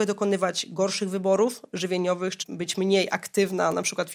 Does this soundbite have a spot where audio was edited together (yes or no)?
yes